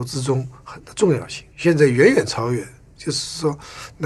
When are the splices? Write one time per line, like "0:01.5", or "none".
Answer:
0:01.5